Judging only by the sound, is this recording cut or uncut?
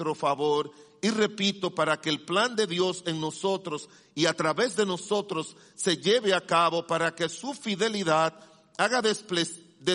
uncut